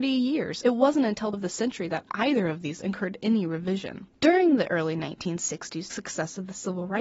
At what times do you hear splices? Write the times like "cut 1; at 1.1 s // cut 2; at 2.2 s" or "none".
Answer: cut 1; at 1.3 s // cut 2; at 2.8 s // cut 3; at 5.9 s